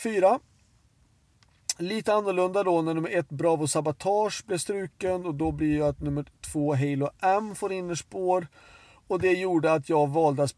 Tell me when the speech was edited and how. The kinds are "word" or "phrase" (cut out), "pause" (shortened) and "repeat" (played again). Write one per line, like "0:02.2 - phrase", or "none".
none